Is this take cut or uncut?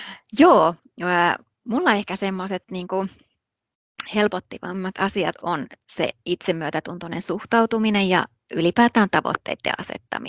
uncut